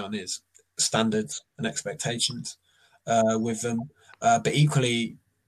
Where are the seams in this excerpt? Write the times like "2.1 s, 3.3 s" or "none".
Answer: none